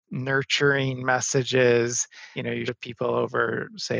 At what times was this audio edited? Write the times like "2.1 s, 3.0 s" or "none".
2.3 s, 2.7 s